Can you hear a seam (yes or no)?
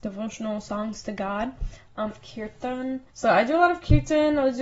yes